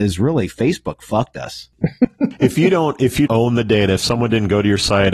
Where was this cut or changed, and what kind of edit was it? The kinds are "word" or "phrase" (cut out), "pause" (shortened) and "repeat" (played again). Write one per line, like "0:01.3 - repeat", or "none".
0:03.3 - word